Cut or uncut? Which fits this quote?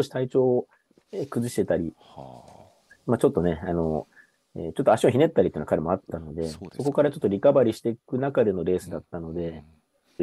uncut